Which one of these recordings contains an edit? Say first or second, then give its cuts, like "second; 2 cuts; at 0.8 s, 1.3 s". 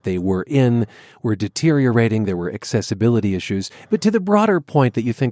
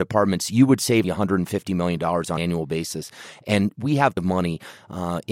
second; 3 cuts; at 1.0 s, 2.4 s, 4.2 s